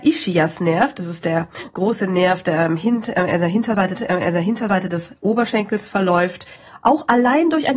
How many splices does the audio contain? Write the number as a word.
one